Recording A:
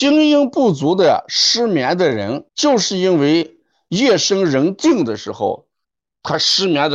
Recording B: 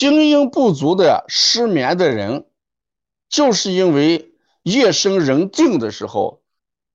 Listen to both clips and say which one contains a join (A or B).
A